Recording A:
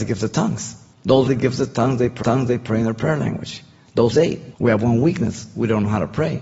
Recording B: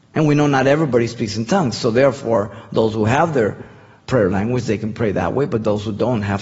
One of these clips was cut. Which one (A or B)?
A